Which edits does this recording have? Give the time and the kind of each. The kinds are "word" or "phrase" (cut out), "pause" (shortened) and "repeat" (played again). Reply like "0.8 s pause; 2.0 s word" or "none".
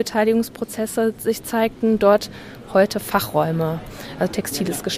none